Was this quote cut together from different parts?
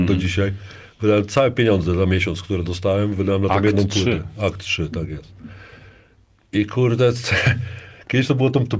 no; 0 cuts

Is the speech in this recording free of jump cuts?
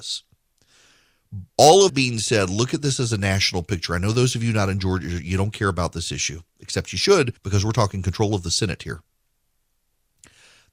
no; 3 cuts; at 1.5 s, 1.9 s, 7.4 s

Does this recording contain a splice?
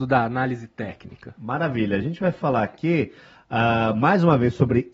no; 0 cuts

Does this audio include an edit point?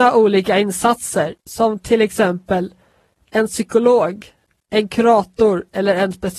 no; 0 cuts

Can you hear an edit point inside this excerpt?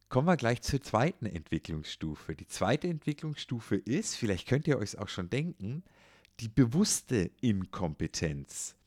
no; 0 cuts

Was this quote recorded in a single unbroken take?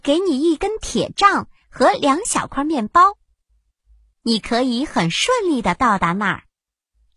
yes; 0 cuts

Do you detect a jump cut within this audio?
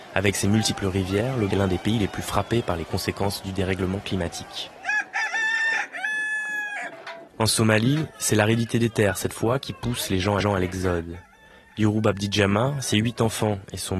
yes; 3 cuts; at 1.5 s, 7.3 s, 10.4 s

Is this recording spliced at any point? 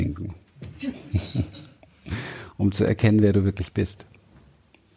no; 0 cuts

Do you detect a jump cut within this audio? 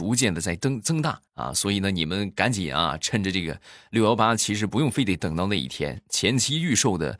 yes; 1 cut; at 1.3 s

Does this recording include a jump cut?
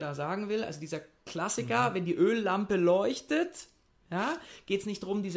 no; 0 cuts

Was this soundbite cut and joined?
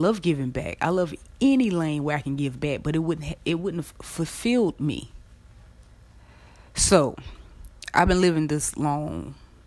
no; 0 cuts

